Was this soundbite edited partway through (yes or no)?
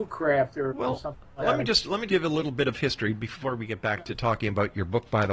yes